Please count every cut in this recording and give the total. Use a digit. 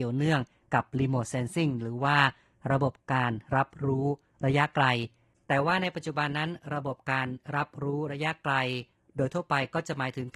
0